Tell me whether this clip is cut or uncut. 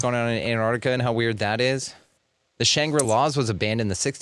uncut